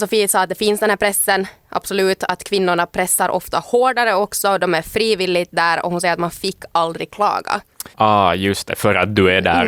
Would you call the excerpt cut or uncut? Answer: cut